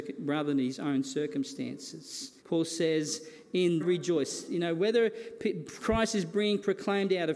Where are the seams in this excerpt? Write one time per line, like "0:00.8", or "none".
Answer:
0:02.4
0:03.8